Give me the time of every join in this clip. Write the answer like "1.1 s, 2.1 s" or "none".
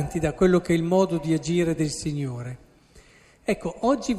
none